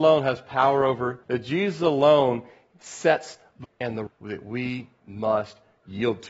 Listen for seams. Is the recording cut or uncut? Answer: cut